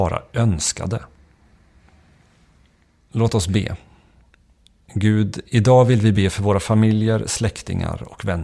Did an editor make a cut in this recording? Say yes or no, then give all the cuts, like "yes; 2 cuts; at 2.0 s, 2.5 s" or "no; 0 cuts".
no; 0 cuts